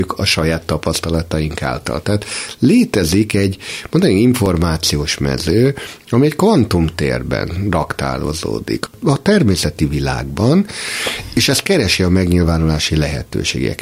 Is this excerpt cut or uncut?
uncut